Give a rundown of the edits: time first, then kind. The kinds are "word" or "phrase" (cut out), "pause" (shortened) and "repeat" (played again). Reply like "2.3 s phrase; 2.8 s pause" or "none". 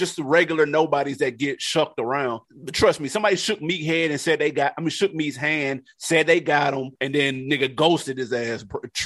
2.4 s pause; 7.0 s pause